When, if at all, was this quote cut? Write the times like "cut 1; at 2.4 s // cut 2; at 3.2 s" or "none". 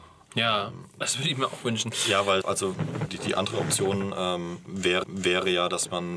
cut 1; at 1.0 s // cut 2; at 2.4 s // cut 3; at 3.1 s // cut 4; at 5.0 s